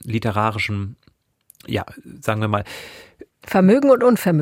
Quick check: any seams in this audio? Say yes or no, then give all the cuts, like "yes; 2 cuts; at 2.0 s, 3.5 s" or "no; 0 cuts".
no; 0 cuts